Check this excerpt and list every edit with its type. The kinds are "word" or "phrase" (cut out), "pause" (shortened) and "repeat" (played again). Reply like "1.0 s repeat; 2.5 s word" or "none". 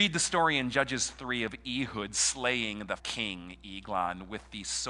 3.0 s word